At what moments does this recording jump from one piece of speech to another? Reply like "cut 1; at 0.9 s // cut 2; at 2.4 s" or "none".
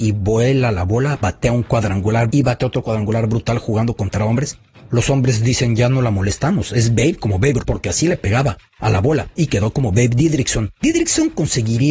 cut 1; at 2.3 s // cut 2; at 7.6 s // cut 3; at 8.7 s // cut 4; at 9.3 s // cut 5; at 10.8 s